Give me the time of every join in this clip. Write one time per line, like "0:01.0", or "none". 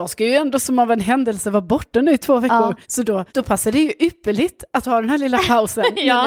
0:02.8
0:03.3